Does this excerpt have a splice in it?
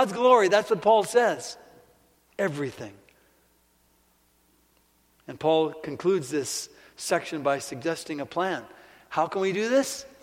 no; 0 cuts

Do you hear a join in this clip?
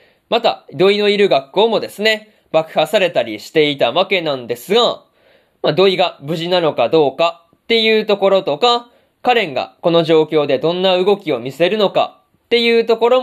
no; 0 cuts

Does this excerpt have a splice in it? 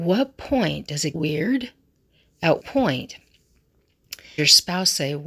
yes; 3 cuts; at 1.1 s, 2.6 s, 4.4 s

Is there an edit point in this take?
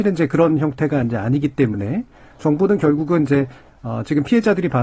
no; 0 cuts

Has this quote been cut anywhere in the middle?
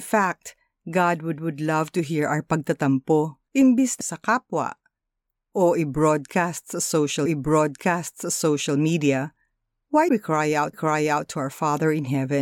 yes; 6 cuts; at 1.4 s, 3.5 s, 4.0 s, 7.3 s, 10.1 s, 10.7 s

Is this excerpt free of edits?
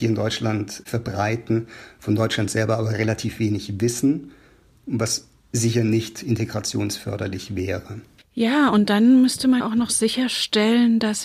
no; 1 cut; at 9.6 s

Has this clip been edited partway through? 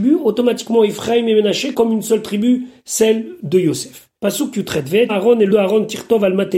yes; 4 cuts; at 1.7 s, 4.2 s, 5.1 s, 5.5 s

